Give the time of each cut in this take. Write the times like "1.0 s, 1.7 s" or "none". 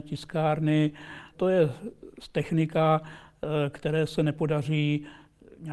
1.3 s